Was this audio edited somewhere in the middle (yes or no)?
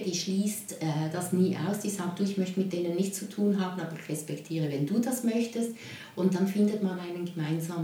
no